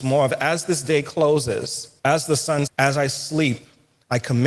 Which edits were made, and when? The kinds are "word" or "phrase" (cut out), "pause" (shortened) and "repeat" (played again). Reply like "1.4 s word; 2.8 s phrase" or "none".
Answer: 2.0 s pause; 2.7 s word

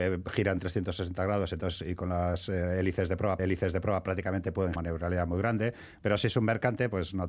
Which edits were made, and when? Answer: 3.4 s repeat; 4.7 s phrase

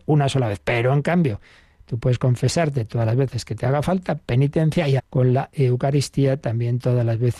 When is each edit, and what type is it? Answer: 5.0 s word

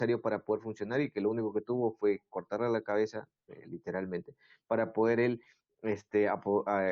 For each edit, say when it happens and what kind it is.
3.4 s pause

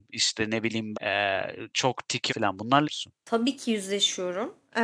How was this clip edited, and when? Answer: 0.9 s word; 2.3 s phrase; 2.8 s word; 3.2 s pause

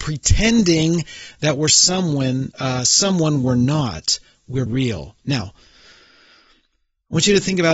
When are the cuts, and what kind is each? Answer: 4.7 s word

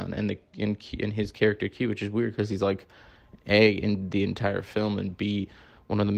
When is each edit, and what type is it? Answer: none

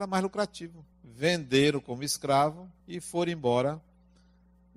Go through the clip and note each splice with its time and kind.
0.9 s pause; 2.8 s pause

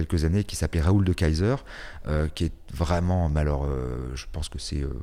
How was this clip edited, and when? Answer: none

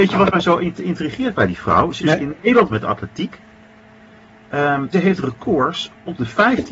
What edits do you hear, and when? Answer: 2.0 s word; 2.7 s word; 4.9 s word

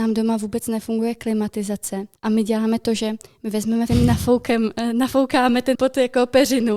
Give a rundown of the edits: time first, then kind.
2.2 s pause; 3.9 s phrase; 5.7 s word

